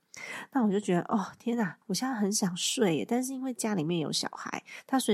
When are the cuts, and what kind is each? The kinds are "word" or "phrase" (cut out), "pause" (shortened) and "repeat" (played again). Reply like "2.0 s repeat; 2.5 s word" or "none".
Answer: 1.8 s pause